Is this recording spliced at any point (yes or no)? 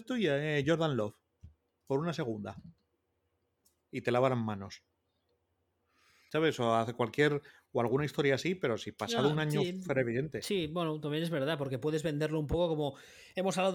no